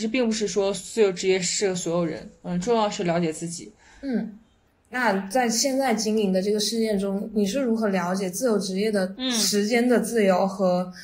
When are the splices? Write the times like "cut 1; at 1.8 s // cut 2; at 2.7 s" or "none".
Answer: none